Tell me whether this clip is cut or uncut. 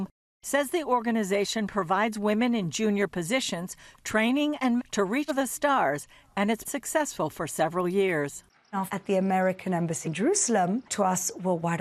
cut